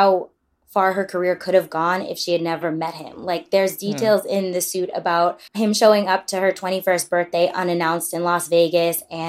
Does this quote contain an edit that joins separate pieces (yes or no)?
yes